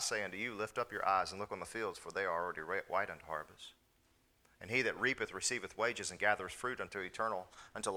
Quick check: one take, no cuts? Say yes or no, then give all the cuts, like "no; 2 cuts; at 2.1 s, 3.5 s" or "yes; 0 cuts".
yes; 0 cuts